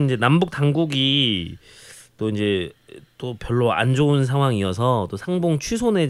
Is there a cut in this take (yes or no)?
no